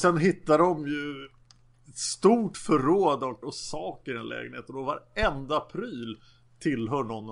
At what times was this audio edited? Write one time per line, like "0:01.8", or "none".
0:03.4

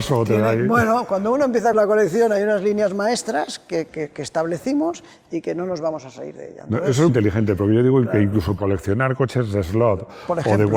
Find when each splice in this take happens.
0:01.7
0:03.9
0:07.1
0:08.6

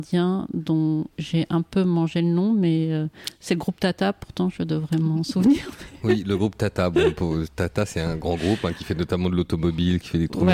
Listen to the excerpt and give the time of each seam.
0:01.1

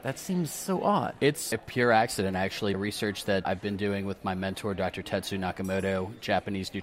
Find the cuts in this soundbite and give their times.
0:01.5
0:02.7
0:03.4

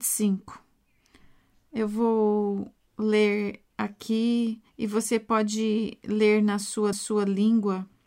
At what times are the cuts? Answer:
0:04.7
0:06.9

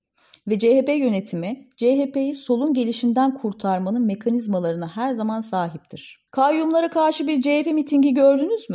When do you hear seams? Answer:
0:06.3

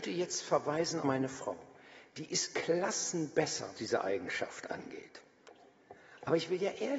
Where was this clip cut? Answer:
0:01.0
0:02.5
0:03.7

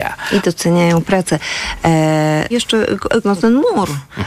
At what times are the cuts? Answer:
0:02.5
0:03.2

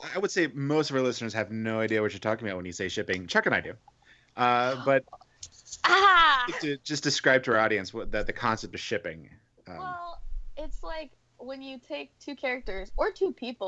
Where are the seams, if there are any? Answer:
none

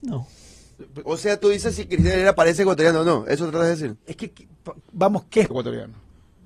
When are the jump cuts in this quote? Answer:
0:04.8
0:05.5

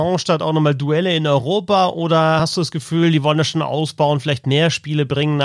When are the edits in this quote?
none

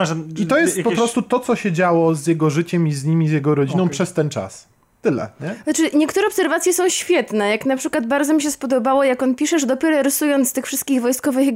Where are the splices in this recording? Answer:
none

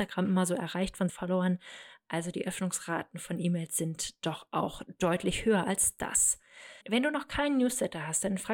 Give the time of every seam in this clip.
0:01.1
0:06.8

